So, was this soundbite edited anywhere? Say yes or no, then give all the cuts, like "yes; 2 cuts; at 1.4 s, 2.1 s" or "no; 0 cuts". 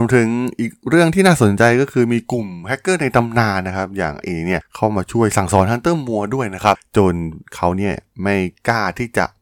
yes; 1 cut; at 4.2 s